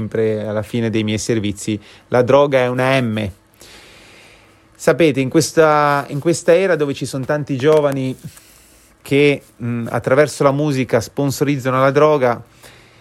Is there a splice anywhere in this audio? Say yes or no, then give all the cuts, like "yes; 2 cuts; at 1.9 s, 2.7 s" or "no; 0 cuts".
no; 0 cuts